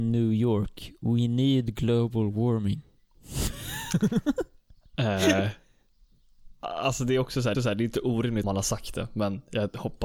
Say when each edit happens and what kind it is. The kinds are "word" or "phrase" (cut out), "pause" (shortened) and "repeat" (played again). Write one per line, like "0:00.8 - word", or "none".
0:07.5 - repeat
0:08.4 - word